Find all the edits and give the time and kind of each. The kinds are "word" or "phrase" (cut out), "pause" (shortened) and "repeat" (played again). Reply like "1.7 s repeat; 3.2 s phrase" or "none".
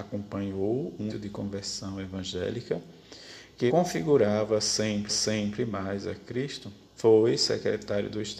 1.1 s word; 3.7 s word; 5.1 s repeat; 6.8 s pause